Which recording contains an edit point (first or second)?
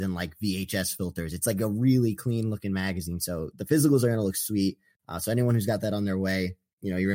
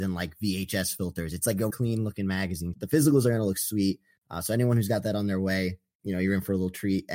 second